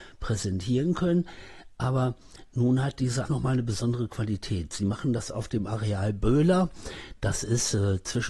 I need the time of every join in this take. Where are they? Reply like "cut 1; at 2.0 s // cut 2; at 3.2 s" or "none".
cut 1; at 3.3 s